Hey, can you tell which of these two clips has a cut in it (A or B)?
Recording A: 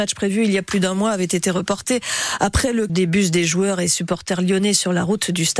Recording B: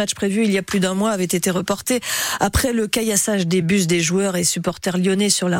A